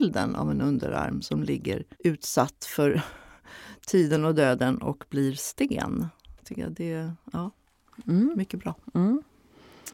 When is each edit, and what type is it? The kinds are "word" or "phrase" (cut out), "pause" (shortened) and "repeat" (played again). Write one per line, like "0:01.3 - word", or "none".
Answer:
0:01.9 - pause
0:06.3 - pause